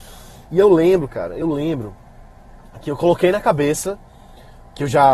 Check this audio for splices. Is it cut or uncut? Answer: uncut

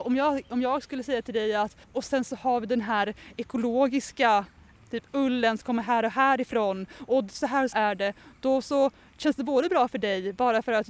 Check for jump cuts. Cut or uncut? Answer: cut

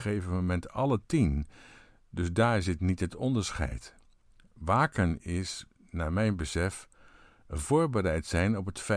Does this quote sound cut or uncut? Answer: uncut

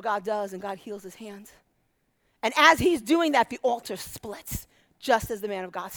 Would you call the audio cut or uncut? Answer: uncut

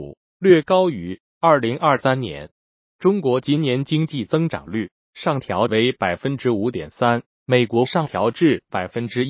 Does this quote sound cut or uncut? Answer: uncut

